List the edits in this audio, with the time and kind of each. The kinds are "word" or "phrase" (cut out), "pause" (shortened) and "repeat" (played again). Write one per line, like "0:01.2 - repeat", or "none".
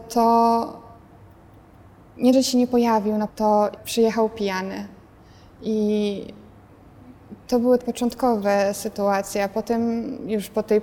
0:02.3 - word
0:03.3 - word
0:03.8 - word
0:07.8 - word

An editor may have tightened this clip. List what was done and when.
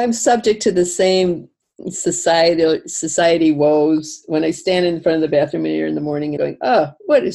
0:06.4 - word

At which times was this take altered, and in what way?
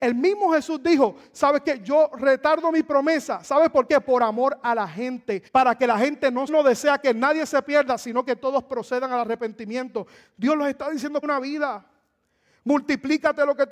0:05.5 - pause
0:06.5 - phrase
0:11.2 - word

